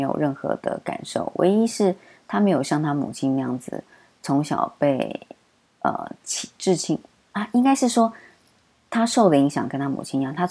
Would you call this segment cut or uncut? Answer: uncut